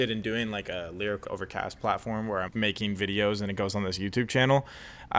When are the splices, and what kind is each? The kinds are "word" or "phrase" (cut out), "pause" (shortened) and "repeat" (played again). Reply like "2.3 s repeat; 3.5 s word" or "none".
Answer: 1.2 s word; 2.5 s word